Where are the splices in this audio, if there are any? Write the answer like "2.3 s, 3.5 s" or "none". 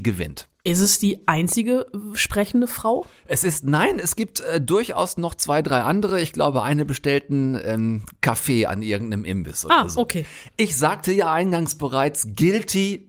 none